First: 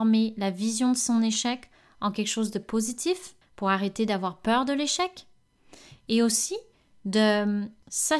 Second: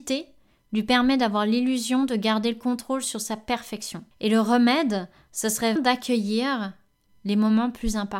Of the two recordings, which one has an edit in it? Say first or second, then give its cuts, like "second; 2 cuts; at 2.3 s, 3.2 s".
second; 1 cut; at 5.8 s